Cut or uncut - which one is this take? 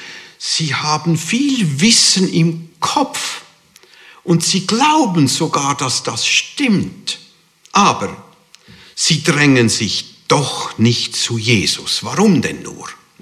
uncut